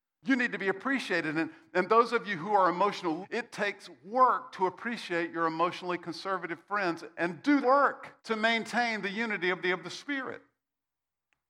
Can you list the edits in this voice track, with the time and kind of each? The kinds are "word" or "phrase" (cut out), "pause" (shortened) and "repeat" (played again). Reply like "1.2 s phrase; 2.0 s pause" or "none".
3.2 s word; 7.6 s word; 8.2 s pause; 9.6 s repeat